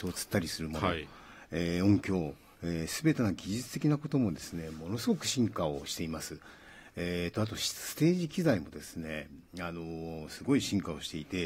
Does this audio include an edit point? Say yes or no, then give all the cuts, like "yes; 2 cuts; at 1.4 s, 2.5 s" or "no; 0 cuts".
no; 0 cuts